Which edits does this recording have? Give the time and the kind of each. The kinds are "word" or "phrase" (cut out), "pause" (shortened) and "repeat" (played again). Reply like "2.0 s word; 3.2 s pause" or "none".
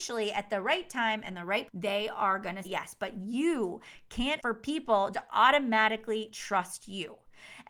1.7 s word; 2.6 s word; 4.4 s word; 5.1 s word